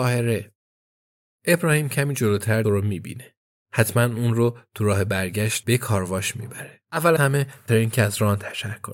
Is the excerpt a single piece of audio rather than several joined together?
no; 3 cuts; at 2.6 s, 7.2 s, 7.7 s

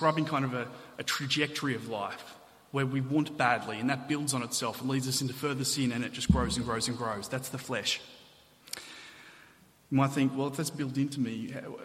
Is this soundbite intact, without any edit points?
yes; 0 cuts

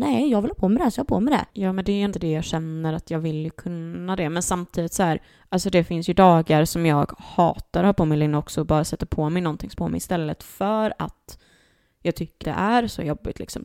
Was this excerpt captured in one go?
no; 4 cuts; at 1.5 s, 2.1 s, 9.8 s, 12.4 s

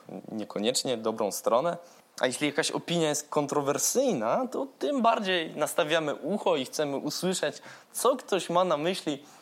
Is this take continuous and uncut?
no; 1 cut; at 2.0 s

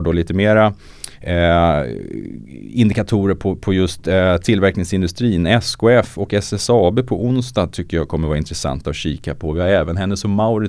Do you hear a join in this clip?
no; 0 cuts

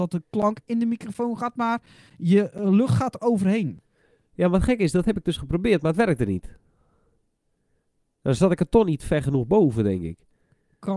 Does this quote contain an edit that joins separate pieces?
no; 0 cuts

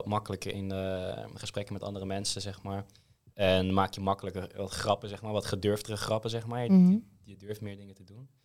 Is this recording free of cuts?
yes; 0 cuts

